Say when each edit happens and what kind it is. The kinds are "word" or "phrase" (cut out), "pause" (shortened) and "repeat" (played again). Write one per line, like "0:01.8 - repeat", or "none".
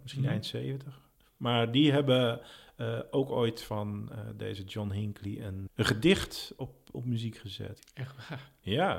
none

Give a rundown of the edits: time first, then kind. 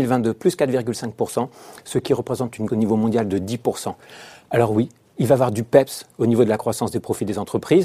0:02.7 - word

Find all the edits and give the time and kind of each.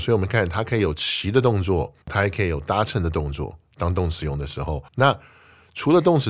0:02.0 - pause
0:04.9 - pause

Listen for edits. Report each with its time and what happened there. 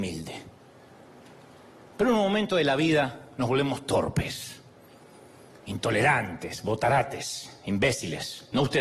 none

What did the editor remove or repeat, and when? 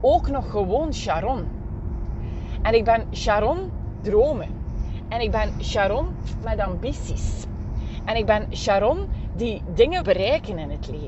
0:04.0 - word
0:10.0 - word

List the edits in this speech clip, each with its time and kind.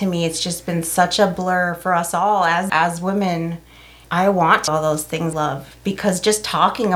0:02.7 - word
0:04.0 - word
0:04.7 - word
0:05.3 - word

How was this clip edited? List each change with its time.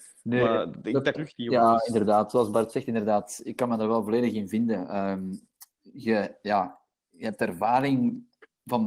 0:01.1 - phrase

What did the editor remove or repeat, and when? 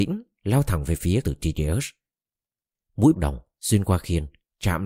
0:01.2 - word
0:03.1 - word

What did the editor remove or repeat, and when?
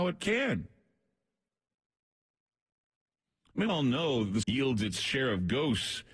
0:03.7 - word
0:04.4 - word

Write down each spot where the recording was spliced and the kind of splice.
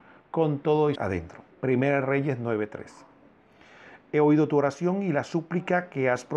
0:01.0 - phrase
0:01.5 - pause

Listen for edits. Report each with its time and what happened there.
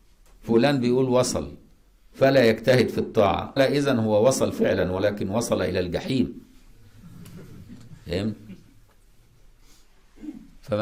0:03.6 - word

